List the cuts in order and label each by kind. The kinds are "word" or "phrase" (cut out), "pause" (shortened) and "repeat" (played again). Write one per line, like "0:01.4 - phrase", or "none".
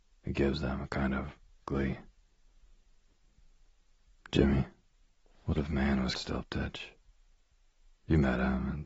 0:01.6 - word
0:05.6 - word
0:06.1 - word